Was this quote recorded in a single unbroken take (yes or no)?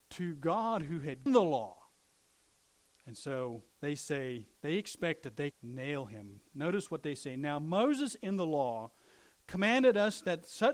no